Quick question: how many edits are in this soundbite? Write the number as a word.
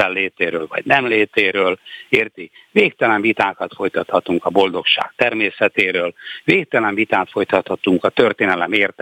zero